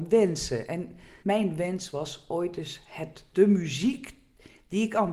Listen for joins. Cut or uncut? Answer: cut